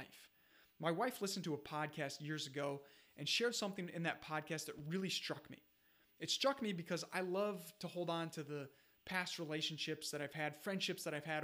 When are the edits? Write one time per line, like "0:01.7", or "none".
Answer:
none